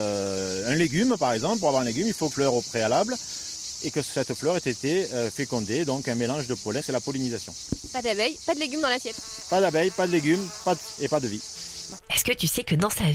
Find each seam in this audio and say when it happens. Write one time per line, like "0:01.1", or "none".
0:02.3
0:06.8
0:11.0